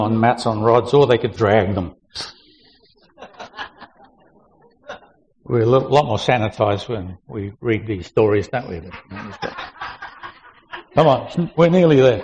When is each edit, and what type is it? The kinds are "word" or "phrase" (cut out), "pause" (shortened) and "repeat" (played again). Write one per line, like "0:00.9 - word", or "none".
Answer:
0:01.4 - word